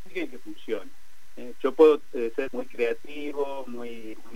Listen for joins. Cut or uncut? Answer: cut